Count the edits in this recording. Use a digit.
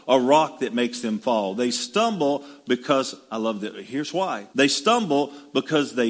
1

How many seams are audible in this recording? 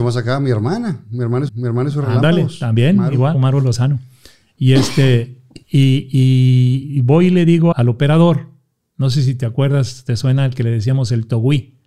4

